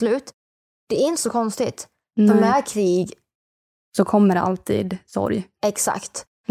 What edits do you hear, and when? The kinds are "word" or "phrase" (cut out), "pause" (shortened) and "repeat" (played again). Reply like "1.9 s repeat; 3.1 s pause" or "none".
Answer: none

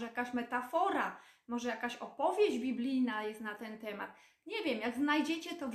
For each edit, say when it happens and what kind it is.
none

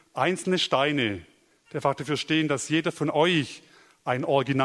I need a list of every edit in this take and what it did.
none

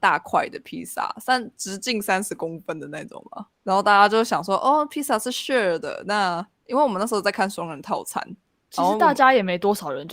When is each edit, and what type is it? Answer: none

